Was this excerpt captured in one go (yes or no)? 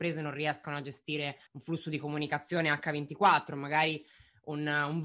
no